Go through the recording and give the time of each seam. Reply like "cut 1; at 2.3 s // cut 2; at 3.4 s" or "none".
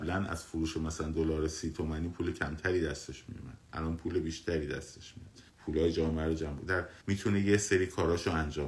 cut 1; at 5.5 s // cut 2; at 7.0 s